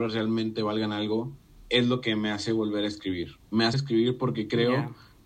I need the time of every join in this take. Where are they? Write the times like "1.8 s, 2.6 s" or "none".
1.5 s, 3.4 s, 3.7 s

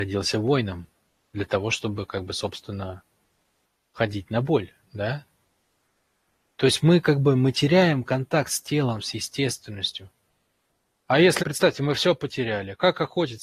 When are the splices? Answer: 11.4 s

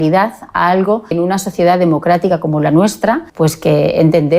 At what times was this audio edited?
1.1 s, 3.3 s

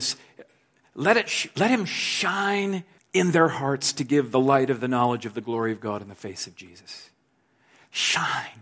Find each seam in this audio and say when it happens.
3.0 s

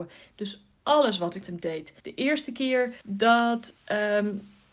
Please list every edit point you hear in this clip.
1.4 s, 2.0 s, 3.0 s

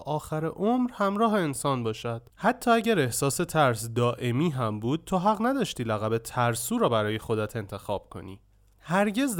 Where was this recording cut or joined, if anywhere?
2.3 s

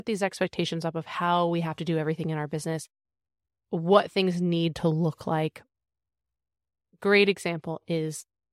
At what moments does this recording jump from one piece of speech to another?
none

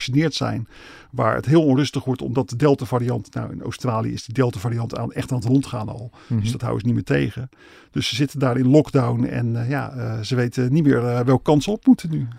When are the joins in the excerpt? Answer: none

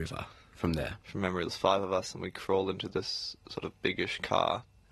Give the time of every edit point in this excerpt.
1.0 s

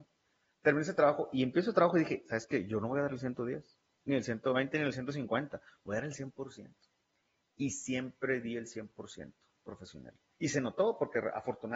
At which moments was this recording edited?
none

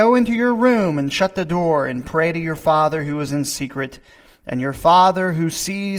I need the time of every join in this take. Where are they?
none

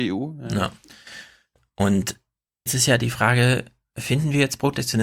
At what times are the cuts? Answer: 2.7 s

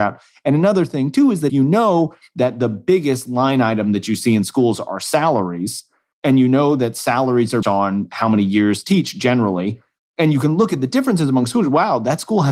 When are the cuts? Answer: 1.5 s, 7.6 s, 8.8 s

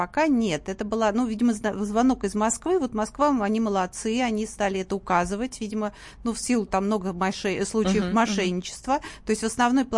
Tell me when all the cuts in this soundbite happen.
6.7 s

